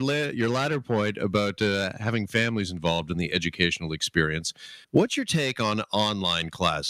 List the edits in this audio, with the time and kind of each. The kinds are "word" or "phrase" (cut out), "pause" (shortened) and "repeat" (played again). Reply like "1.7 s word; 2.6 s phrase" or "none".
4.8 s pause